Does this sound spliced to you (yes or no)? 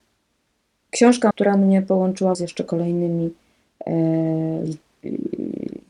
yes